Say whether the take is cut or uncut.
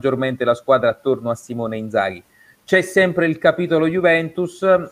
uncut